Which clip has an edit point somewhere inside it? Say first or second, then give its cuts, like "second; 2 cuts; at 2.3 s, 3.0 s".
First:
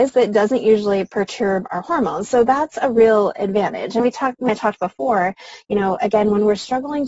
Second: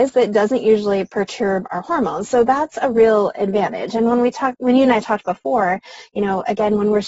first; 2 cuts; at 4.0 s, 4.5 s